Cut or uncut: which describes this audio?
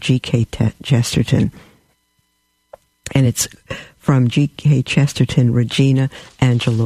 uncut